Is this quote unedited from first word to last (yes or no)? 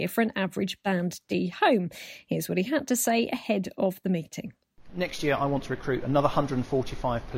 yes